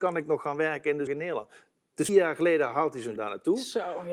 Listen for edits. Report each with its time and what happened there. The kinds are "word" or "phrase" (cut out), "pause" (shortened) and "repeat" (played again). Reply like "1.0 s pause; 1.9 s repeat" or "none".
1.1 s word; 2.1 s word; 3.2 s word